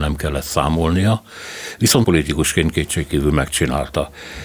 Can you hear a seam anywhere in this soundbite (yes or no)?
yes